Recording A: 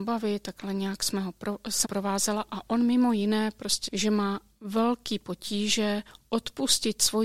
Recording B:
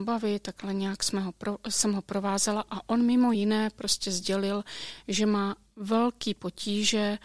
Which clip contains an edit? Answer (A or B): A